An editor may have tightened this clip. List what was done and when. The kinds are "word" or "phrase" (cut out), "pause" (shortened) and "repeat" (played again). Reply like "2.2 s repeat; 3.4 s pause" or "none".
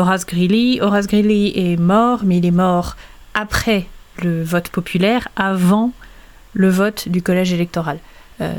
none